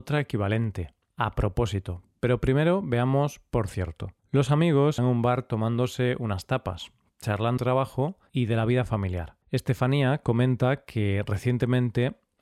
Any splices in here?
yes; 5 cuts; at 4.2 s, 5.0 s, 7.6 s, 8.3 s, 9.4 s

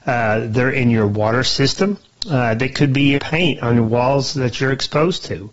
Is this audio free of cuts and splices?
no; 1 cut; at 3.2 s

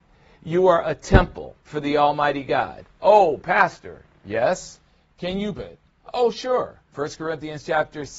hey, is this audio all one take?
no; 3 cuts; at 1.6 s, 5.6 s, 6.8 s

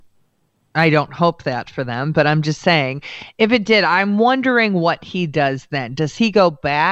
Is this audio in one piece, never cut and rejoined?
yes; 0 cuts

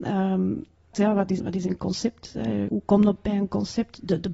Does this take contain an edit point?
yes; 3 cuts; at 0.9 s, 1.4 s, 2.7 s

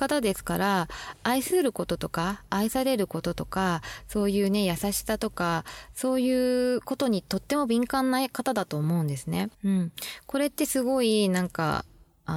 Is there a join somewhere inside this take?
yes; 1 cut; at 9.5 s

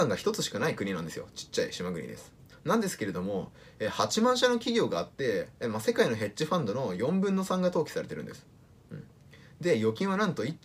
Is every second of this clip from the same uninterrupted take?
yes; 0 cuts

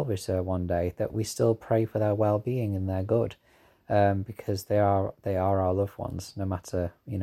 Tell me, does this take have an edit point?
no; 0 cuts

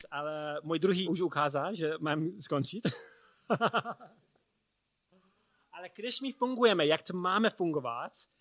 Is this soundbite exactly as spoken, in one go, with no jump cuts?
no; 1 cut; at 1.0 s

